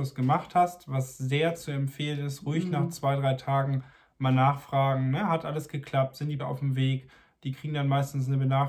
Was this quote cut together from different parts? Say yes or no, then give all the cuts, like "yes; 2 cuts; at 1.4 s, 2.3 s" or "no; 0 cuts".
yes; 1 cut; at 6.4 s